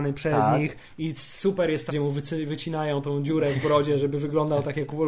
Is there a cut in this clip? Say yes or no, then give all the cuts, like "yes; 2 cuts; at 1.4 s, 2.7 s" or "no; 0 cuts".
yes; 1 cut; at 1.9 s